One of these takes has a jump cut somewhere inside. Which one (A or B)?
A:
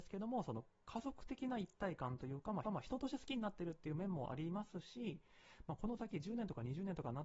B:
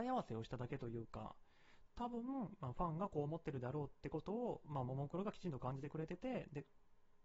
A